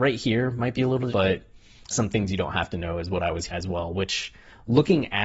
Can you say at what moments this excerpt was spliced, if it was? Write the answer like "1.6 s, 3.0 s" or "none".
1.1 s, 1.9 s, 3.5 s